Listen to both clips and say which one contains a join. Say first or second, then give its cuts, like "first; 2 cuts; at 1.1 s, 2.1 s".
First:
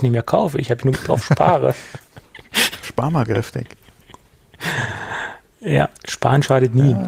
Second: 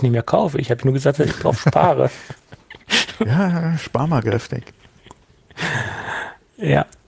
first; 3 cuts; at 0.9 s, 2.8 s, 6.0 s